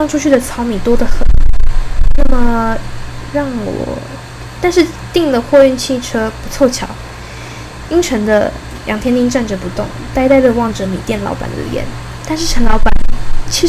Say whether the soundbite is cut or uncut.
uncut